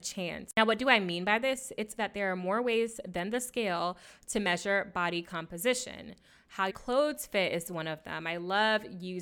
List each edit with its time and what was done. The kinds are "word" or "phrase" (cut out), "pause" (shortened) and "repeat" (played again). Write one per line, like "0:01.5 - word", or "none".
0:02.0 - word
0:06.7 - word